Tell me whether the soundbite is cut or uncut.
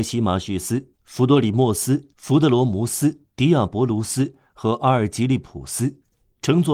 cut